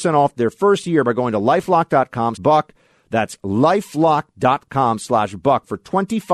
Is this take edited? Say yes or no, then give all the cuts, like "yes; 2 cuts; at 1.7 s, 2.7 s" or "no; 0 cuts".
yes; 1 cut; at 2.4 s